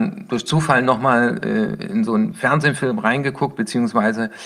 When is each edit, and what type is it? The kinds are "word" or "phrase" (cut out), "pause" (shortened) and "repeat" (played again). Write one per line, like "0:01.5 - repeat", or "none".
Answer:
none